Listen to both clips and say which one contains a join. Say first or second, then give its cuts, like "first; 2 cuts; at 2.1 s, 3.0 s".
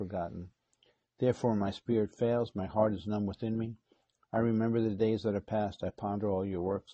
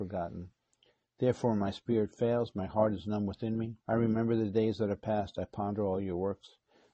second; 1 cut; at 3.8 s